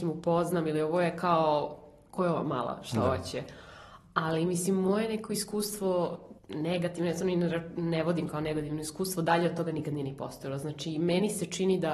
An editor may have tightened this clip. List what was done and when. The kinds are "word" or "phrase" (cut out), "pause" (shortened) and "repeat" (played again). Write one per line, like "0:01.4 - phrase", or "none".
0:06.4 - pause

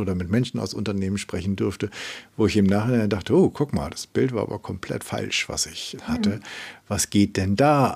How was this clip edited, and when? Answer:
0:06.0 - word

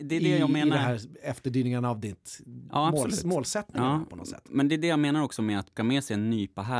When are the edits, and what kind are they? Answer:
0:05.8 - word

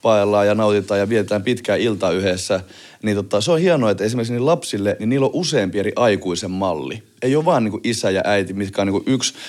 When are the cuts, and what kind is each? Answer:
none

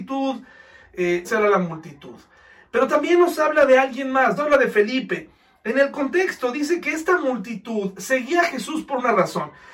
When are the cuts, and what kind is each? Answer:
0:01.2 - word
0:04.4 - word

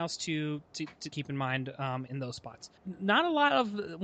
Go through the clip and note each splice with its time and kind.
0:01.1 - word
0:02.1 - word
0:02.8 - pause

